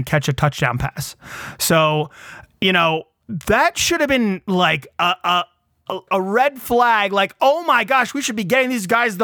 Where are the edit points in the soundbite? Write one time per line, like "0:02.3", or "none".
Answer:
0:06.1